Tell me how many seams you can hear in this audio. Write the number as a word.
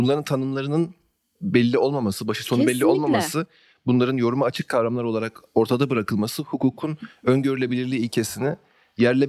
zero